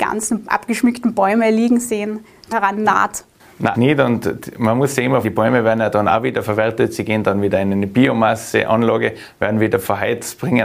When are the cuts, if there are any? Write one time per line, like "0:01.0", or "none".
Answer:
0:02.5
0:03.7
0:05.2